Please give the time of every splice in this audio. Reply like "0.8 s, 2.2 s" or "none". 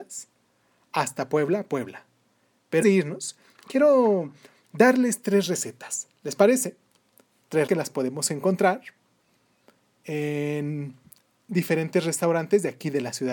2.8 s, 7.7 s